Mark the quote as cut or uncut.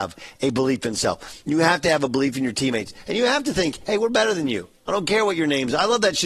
uncut